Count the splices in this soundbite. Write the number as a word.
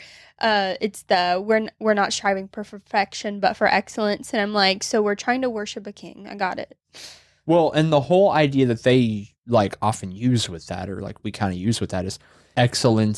zero